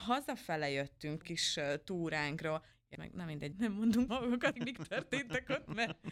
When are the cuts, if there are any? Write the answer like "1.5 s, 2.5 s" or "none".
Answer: 1.2 s, 2.9 s, 3.5 s, 4.1 s, 4.6 s